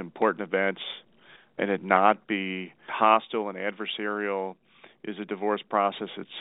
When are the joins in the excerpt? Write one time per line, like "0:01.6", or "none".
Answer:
0:01.6
0:02.9